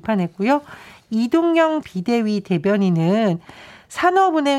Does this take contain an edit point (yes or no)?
yes